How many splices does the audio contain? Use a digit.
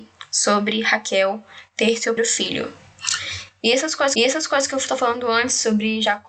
2